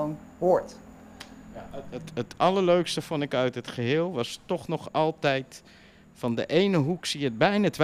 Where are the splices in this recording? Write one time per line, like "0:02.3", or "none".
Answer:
none